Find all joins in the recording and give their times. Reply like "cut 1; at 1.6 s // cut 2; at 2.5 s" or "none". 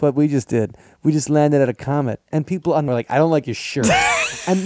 cut 1; at 2.9 s